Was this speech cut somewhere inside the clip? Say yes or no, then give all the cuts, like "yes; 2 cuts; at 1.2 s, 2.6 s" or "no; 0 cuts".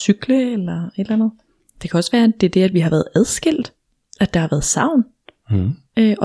no; 0 cuts